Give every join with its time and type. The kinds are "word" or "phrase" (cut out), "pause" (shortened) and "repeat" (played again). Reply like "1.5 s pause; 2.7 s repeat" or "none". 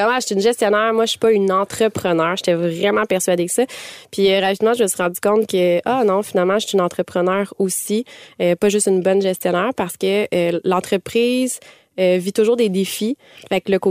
none